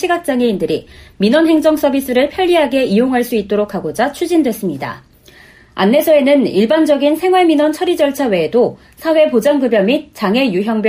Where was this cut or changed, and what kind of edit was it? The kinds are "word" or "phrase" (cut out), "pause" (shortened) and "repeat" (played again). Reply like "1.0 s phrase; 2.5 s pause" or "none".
none